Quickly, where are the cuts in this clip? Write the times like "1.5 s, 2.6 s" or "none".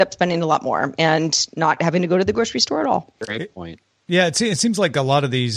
none